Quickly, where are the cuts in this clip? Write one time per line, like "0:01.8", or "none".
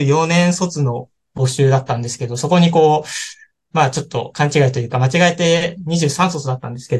none